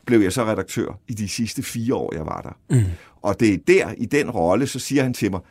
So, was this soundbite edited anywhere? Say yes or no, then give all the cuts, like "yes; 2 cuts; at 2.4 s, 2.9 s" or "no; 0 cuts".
no; 0 cuts